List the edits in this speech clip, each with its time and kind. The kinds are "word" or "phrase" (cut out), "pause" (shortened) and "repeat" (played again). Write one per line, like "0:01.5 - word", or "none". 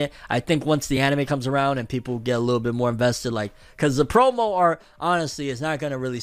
none